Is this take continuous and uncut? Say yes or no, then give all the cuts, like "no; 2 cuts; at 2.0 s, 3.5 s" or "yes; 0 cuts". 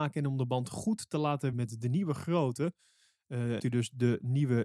no; 2 cuts; at 1.5 s, 3.6 s